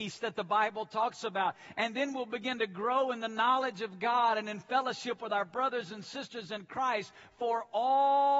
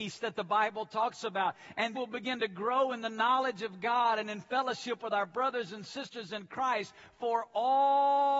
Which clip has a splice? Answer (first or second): second